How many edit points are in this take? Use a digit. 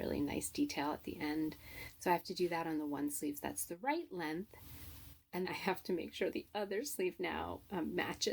2